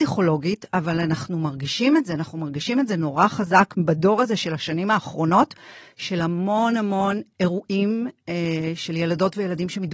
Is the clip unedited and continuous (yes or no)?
yes